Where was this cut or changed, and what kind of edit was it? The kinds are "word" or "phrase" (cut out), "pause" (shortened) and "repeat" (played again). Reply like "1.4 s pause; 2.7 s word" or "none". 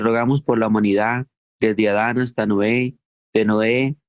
none

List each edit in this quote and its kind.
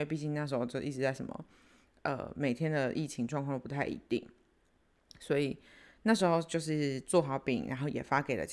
none

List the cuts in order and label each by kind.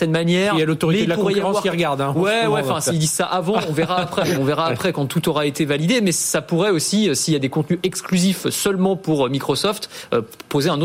4.3 s word

